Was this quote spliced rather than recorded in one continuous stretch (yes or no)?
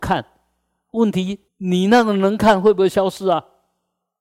yes